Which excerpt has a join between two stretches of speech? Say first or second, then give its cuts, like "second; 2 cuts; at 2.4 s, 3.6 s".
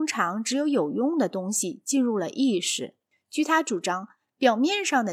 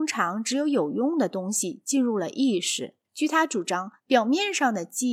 second; 2 cuts; at 3.0 s, 4.0 s